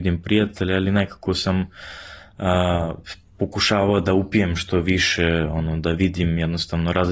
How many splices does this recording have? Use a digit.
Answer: 0